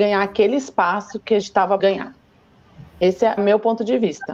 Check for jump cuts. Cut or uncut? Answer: cut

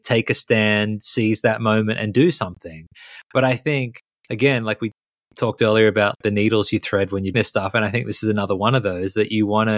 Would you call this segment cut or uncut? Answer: cut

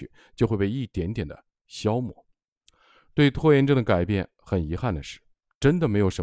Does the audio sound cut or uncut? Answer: uncut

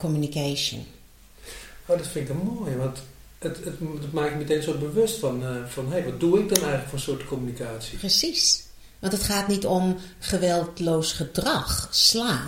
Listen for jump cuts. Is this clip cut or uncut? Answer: uncut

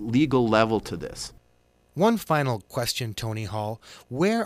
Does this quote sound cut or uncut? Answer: uncut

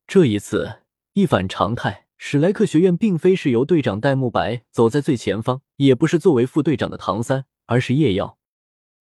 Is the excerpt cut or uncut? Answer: cut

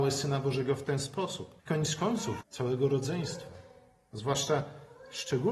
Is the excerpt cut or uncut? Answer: cut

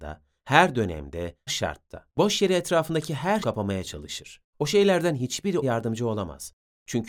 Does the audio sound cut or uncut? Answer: cut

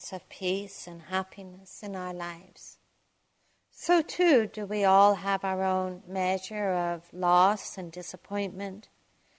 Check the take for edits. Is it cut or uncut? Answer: uncut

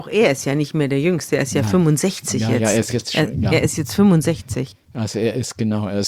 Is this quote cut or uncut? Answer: uncut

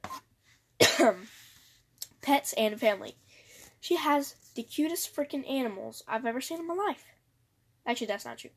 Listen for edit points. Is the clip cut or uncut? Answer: uncut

